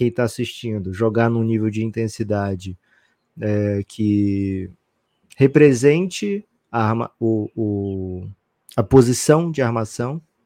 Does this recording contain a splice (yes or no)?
no